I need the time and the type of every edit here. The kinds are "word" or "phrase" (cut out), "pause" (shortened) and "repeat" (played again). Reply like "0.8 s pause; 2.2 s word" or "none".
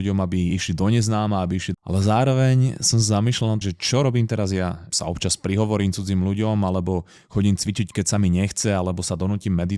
1.7 s word; 3.6 s word; 4.9 s word